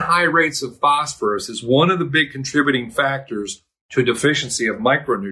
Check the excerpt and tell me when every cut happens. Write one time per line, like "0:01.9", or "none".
none